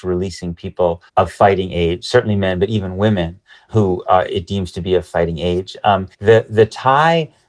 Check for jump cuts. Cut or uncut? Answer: cut